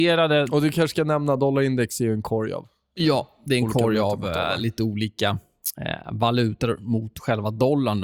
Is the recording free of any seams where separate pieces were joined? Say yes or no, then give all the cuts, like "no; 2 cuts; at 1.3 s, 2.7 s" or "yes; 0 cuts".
yes; 0 cuts